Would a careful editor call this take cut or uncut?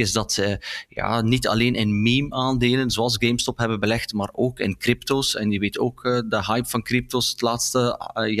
uncut